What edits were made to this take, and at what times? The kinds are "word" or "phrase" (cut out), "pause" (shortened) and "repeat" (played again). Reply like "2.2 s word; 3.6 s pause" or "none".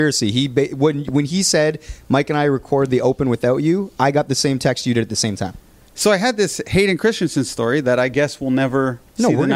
none